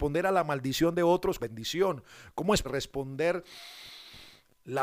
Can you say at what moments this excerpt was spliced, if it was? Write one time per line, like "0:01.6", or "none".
0:01.4
0:02.6